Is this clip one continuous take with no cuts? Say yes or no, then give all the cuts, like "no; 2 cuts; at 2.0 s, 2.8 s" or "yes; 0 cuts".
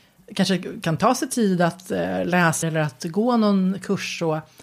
no; 1 cut; at 2.6 s